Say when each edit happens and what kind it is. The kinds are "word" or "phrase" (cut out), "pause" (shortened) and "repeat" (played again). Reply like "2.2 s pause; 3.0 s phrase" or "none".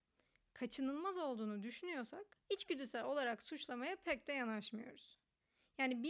2.4 s pause